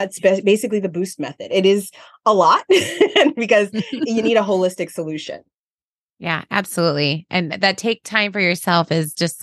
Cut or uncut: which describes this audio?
uncut